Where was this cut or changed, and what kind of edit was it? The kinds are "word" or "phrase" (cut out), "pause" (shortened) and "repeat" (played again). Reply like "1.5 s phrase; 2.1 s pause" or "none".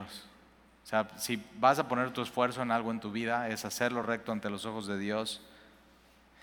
none